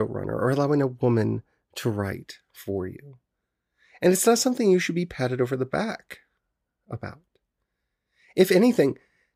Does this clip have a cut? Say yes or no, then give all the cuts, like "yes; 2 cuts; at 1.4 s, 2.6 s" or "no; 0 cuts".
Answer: no; 0 cuts